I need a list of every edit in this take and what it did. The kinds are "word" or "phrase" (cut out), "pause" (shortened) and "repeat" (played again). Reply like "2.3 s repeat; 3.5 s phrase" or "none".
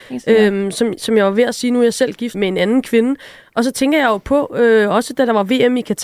2.3 s word